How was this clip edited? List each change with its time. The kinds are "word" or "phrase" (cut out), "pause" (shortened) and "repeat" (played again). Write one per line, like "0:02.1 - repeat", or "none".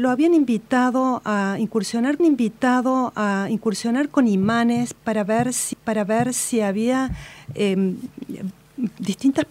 0:02.2 - repeat
0:05.7 - repeat